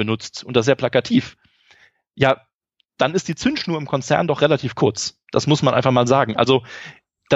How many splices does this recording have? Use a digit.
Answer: 0